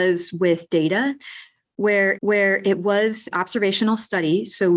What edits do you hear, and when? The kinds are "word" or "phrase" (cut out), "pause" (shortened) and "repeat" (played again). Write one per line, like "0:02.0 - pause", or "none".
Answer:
0:02.2 - repeat
0:03.3 - word